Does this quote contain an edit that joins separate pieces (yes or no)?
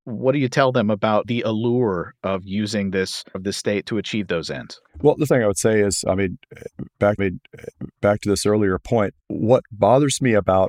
yes